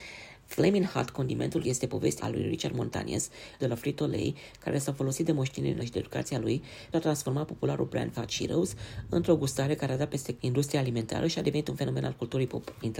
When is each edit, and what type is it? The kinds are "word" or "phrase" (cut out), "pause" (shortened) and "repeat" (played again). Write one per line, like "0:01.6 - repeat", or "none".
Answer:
0:01.6 - word
0:02.2 - word
0:03.6 - word
0:05.8 - word
0:06.9 - word
0:08.1 - word
0:10.4 - word